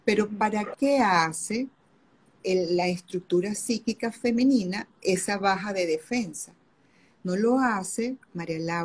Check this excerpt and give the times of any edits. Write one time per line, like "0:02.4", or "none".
none